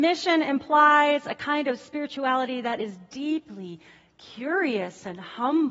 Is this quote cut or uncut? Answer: uncut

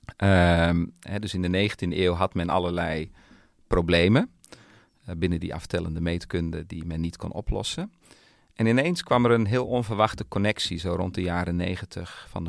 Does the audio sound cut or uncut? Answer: uncut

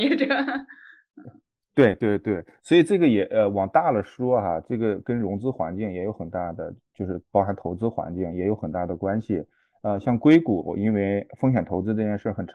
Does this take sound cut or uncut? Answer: cut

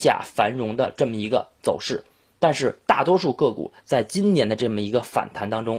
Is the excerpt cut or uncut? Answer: uncut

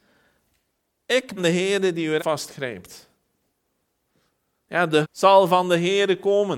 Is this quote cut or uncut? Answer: cut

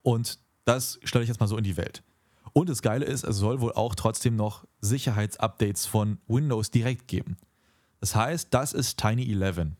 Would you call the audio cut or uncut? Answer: uncut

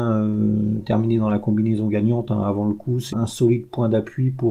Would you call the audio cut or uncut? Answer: cut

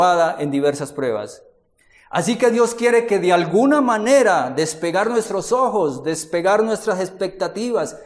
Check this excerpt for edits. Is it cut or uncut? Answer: uncut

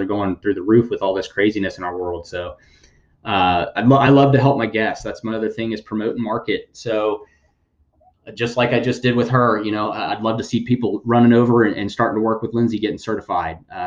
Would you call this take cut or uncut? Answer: uncut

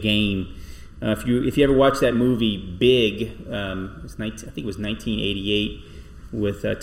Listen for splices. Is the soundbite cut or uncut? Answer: uncut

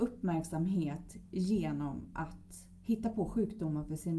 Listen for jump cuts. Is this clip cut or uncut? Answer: uncut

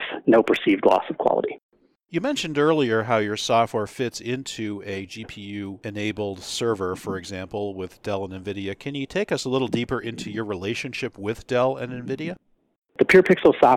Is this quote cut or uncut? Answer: uncut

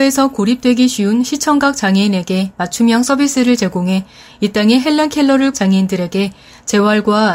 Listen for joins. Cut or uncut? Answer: cut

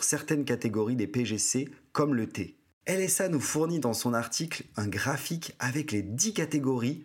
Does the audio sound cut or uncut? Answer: uncut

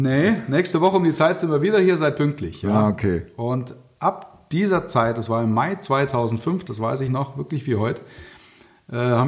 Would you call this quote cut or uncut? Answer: uncut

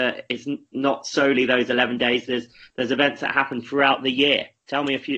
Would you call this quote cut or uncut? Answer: uncut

